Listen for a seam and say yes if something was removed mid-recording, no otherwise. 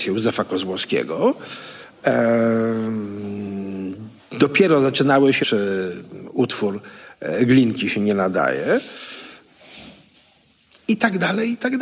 yes